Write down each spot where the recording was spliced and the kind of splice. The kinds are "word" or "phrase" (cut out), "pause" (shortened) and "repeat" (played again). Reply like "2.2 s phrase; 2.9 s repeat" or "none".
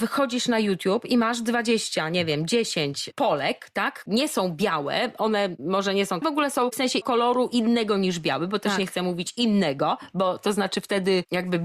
4.1 s word; 6.2 s phrase; 7.0 s word